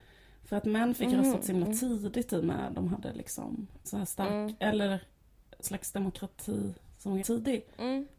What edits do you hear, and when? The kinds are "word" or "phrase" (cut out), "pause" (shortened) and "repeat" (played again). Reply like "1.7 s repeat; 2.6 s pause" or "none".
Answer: 3.8 s word; 5.6 s word; 7.2 s word